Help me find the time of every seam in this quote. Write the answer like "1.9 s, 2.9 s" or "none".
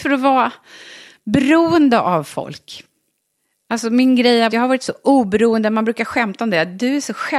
4.5 s